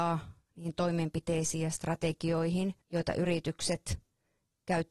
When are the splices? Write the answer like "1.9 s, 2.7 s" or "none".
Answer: 2.8 s